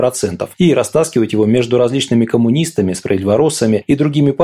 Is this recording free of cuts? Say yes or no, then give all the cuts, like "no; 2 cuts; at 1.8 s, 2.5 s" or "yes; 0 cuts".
yes; 0 cuts